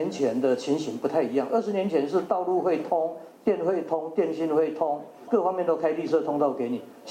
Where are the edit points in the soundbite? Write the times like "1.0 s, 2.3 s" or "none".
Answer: 5.3 s